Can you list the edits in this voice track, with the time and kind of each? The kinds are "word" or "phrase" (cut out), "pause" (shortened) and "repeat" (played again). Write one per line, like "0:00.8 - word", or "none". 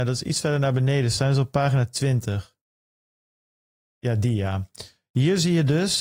none